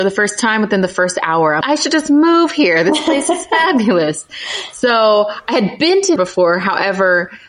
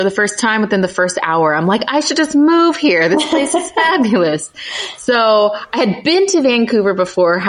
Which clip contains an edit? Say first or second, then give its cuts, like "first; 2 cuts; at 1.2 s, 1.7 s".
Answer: first; 2 cuts; at 1.6 s, 6.2 s